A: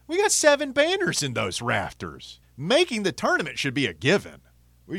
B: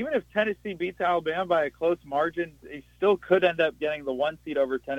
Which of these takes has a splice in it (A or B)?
A